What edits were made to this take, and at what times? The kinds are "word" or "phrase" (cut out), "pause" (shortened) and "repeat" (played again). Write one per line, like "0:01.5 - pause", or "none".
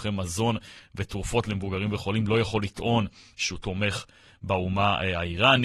none